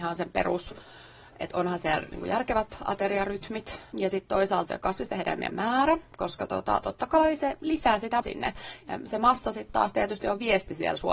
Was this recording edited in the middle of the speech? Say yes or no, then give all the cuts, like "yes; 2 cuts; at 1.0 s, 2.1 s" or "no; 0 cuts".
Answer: yes; 3 cuts; at 4.7 s, 5.5 s, 8.2 s